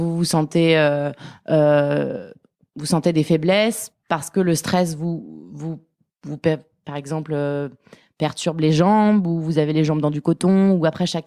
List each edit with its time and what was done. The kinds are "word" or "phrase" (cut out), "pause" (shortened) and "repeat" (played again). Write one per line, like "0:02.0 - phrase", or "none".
none

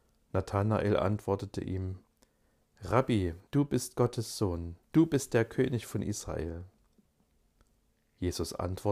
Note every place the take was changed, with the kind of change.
0:03.5 - pause
0:04.8 - pause

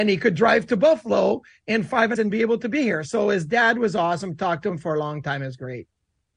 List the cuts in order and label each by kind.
0:02.1 - phrase

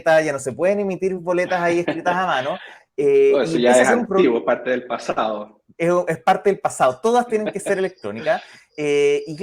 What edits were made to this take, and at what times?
none

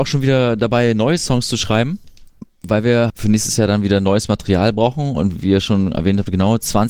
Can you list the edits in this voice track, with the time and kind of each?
0:03.1 - word

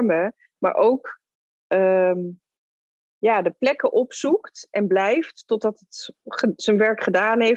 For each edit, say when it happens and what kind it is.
none

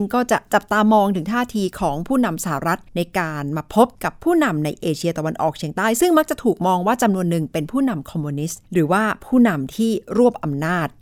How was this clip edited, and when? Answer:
0:02.9 - pause
0:03.9 - pause
0:08.7 - pause

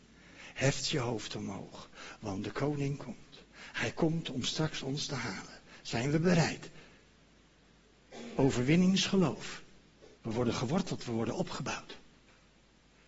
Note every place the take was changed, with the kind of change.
0:03.4 - pause
0:10.1 - pause

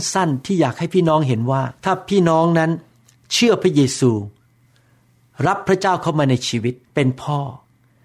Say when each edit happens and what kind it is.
0:01.8 - pause
0:06.8 - pause

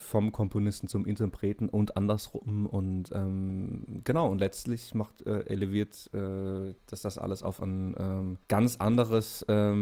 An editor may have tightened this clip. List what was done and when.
0:06.8 - pause
0:08.4 - pause

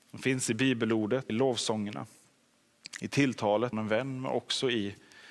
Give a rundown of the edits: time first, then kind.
0:01.3 - phrase
0:03.7 - word

